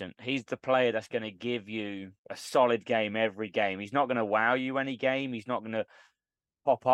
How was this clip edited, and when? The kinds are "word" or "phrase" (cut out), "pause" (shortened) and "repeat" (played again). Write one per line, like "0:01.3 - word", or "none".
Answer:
0:02.2 - pause